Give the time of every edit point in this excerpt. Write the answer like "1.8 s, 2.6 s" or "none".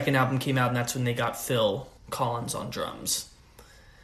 2.0 s